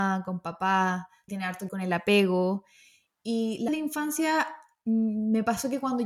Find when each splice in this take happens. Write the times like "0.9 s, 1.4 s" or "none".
1.3 s, 1.7 s, 3.7 s